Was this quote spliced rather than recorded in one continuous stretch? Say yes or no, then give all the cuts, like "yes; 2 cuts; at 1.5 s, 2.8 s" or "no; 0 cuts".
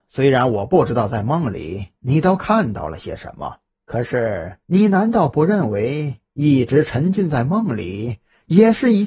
yes; 2 cuts; at 3.7 s, 4.6 s